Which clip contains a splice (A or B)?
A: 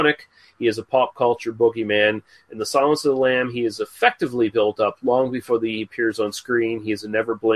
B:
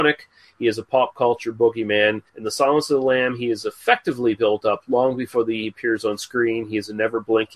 B